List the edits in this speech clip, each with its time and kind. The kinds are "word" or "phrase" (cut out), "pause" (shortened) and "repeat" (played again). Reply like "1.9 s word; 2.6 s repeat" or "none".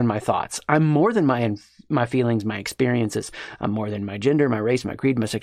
none